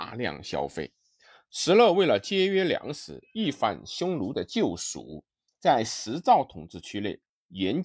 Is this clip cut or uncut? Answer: uncut